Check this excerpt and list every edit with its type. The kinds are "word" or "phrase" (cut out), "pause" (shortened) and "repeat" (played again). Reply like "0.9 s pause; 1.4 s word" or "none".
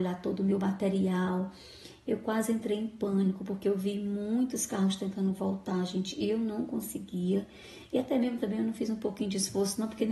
none